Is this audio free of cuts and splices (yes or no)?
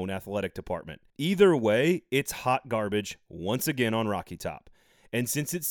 no